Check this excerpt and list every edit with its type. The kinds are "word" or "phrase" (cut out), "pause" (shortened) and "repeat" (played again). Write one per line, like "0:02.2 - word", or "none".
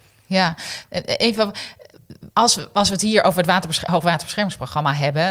0:02.3 - pause